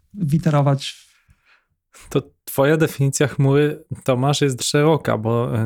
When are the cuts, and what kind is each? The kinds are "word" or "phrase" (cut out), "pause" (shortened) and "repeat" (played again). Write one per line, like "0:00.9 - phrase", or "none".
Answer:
0:04.6 - word